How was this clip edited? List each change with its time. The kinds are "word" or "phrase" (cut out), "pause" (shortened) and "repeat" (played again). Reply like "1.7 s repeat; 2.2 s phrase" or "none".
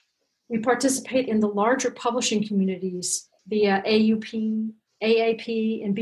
1.3 s word; 3.4 s pause